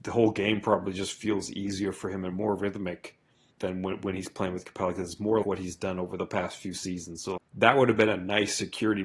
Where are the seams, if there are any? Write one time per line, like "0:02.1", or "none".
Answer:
0:03.5
0:05.4
0:07.4